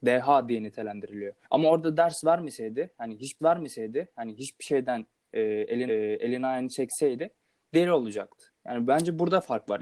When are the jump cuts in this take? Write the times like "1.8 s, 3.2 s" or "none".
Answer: 1.4 s, 3.4 s, 5.9 s